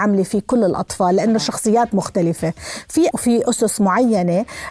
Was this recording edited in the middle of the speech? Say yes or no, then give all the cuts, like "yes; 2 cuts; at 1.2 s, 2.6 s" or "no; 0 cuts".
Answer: yes; 1 cut; at 3.1 s